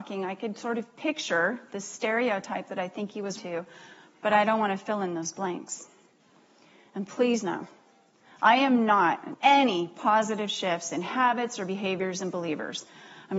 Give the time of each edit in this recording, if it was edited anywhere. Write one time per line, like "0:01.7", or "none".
0:03.4
0:09.3